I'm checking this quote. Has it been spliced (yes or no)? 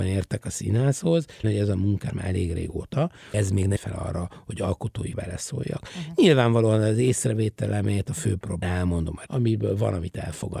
yes